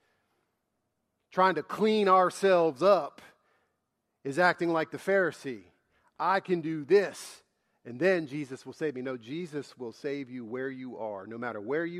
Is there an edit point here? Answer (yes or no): no